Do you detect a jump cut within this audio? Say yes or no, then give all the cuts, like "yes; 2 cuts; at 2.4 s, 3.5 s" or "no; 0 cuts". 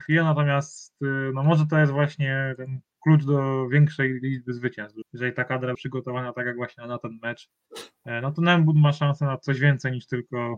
yes; 2 cuts; at 5.0 s, 5.7 s